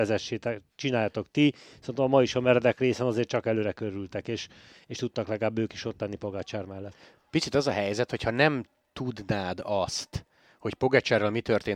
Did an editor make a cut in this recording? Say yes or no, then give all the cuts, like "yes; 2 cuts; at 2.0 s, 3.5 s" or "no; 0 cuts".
no; 0 cuts